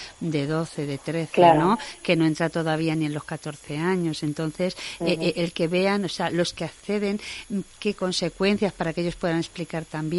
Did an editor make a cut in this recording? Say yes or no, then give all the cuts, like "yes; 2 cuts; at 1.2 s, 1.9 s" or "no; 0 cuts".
no; 0 cuts